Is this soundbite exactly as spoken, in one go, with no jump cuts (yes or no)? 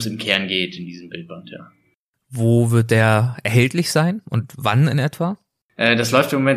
yes